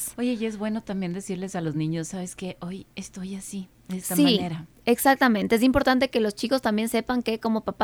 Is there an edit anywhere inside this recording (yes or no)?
no